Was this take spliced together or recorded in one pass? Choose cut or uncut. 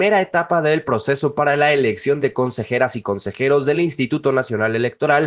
uncut